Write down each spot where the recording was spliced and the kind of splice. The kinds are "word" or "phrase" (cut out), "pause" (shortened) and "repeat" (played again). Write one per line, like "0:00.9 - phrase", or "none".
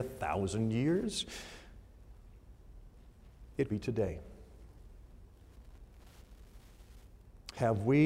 0:03.7 - word